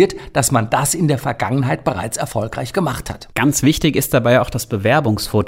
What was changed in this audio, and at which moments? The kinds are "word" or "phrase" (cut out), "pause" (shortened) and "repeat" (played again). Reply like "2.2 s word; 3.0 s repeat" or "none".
3.3 s pause

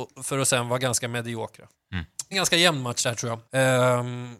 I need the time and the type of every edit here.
1.7 s pause; 2.3 s word; 3.4 s pause

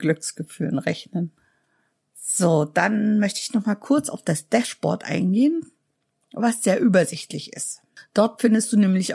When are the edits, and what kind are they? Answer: none

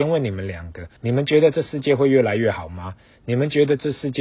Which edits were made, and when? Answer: 1.0 s pause

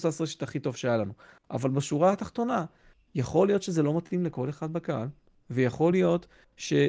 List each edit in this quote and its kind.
none

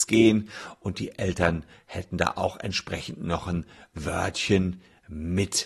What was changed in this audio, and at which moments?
none

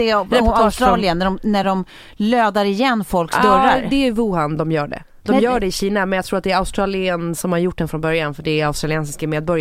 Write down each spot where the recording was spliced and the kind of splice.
none

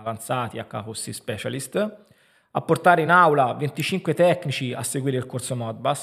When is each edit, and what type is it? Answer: none

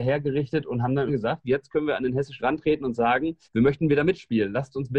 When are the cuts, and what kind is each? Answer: 1.1 s word; 1.4 s word; 2.4 s word; 3.4 s pause

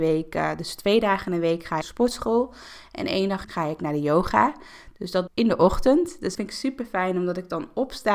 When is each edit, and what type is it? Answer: 1.8 s phrase; 3.4 s phrase; 5.3 s phrase; 6.3 s word

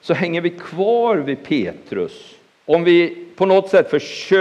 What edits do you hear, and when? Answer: 2.5 s pause

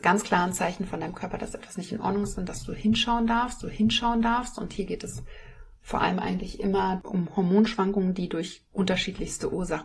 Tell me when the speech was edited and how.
3.6 s repeat

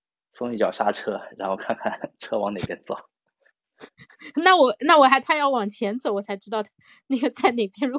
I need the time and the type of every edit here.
none

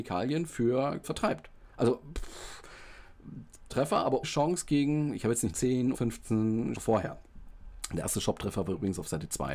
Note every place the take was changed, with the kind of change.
1.0 s word; 3.7 s word; 4.2 s word; 5.5 s word; 5.9 s word; 6.7 s word

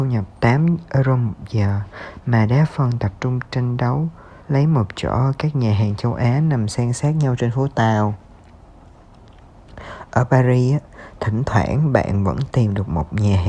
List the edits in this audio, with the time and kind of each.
4.4 s pause

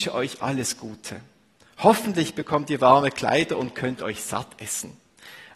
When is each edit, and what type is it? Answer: none

